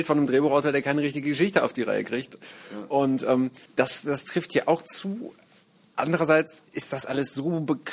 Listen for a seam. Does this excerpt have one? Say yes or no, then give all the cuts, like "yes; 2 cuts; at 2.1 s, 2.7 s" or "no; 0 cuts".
yes; 2 cuts; at 3.7 s, 6.7 s